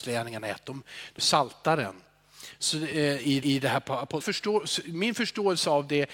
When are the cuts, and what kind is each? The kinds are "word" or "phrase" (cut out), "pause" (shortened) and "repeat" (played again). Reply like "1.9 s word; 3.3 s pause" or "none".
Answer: 1.2 s phrase; 3.4 s repeat; 4.2 s word